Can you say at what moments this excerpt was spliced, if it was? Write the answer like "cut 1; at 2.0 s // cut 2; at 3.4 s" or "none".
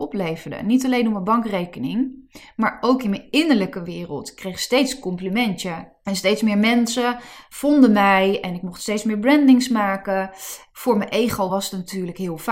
none